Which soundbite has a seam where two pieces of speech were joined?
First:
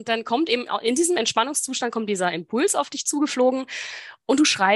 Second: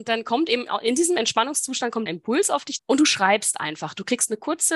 second; 2 cuts; at 2.1 s, 2.8 s

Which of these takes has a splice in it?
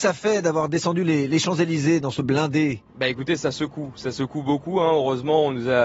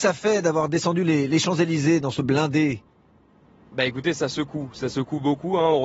first; 1 cut; at 2.9 s

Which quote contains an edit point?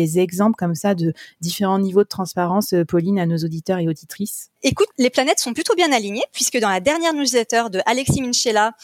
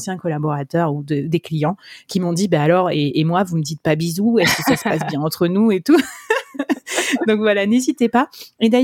first; 1 cut; at 4.9 s

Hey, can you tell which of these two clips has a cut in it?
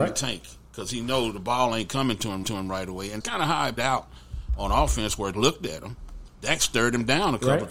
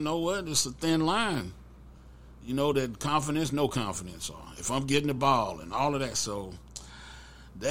first; 4 cuts; at 2.4 s, 3.2 s, 3.8 s, 5.3 s

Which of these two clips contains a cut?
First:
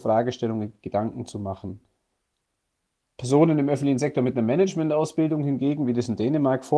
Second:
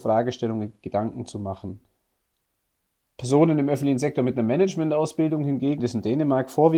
second; 1 cut; at 5.8 s

